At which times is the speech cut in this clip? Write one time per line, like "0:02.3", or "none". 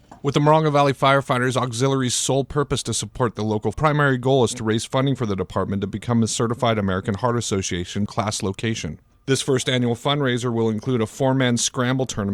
0:03.7
0:08.1